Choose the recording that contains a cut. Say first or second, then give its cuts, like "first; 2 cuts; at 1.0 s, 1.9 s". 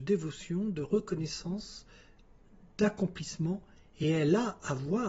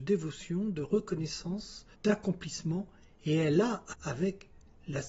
second; 2 cuts; at 1.9 s, 3.9 s